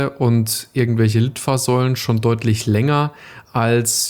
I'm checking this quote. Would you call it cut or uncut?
uncut